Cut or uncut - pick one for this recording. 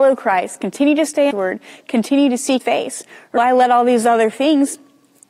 cut